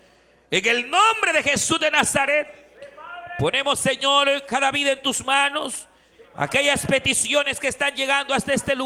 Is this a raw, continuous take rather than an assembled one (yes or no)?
yes